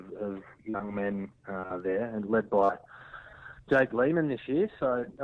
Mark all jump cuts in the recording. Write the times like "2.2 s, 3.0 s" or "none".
none